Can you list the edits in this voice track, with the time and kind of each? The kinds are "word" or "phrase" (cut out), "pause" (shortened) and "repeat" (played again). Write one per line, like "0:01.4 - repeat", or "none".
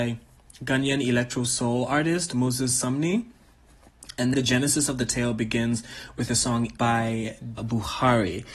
0:04.3 - word
0:06.8 - word
0:07.6 - word